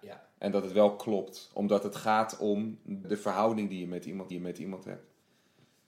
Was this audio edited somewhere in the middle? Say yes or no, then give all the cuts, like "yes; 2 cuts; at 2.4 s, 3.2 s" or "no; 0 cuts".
yes; 2 cuts; at 3.0 s, 4.3 s